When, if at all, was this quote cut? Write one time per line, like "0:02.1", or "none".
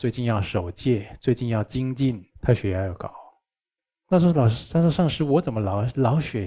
0:02.3
0:03.8